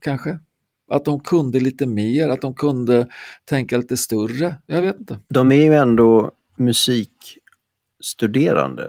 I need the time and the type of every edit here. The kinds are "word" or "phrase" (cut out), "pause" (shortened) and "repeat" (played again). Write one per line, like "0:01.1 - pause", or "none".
none

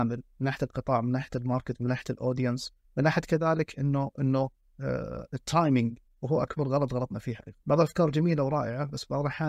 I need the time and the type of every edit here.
0:02.8 - pause
0:06.0 - pause
0:07.6 - pause

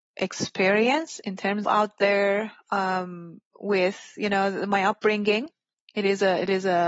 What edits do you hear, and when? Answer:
0:01.6 - phrase
0:03.5 - pause

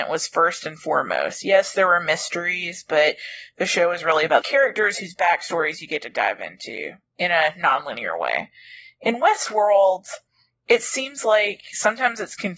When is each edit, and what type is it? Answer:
0:04.4 - word

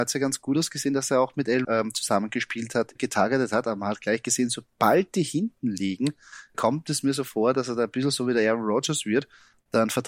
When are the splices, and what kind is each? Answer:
0:01.6 - word
0:03.0 - phrase
0:06.5 - word

